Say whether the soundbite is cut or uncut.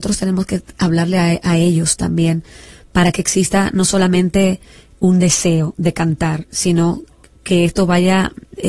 uncut